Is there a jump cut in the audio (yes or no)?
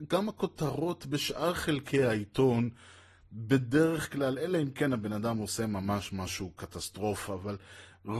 no